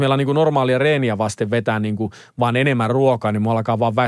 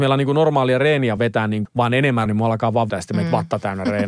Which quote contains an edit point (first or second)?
second